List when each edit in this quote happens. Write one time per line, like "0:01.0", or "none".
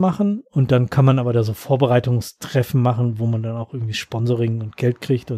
none